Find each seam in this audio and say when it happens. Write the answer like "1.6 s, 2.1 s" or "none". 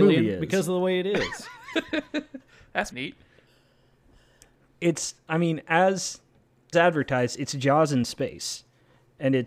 2.9 s, 6.7 s